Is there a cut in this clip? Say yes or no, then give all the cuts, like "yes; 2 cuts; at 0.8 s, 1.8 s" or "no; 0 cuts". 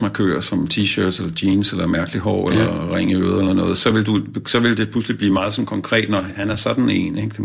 no; 0 cuts